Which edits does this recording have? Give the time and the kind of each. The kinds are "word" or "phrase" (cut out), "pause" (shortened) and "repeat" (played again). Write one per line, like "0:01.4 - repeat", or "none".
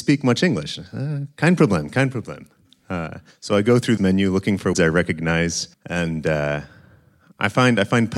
0:03.3 - pause
0:04.0 - word
0:04.7 - word
0:05.7 - pause